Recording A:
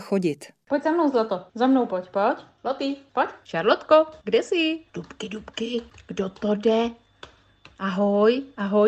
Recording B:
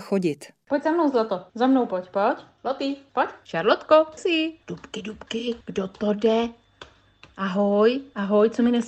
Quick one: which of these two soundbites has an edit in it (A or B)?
B